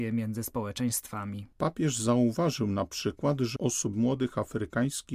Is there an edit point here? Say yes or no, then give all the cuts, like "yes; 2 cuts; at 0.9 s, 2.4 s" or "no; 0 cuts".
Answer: yes; 2 cuts; at 3.6 s, 3.9 s